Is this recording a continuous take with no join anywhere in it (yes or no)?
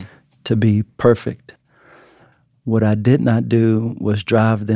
yes